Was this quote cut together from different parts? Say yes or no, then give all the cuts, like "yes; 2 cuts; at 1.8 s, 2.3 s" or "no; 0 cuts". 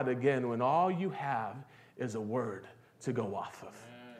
no; 0 cuts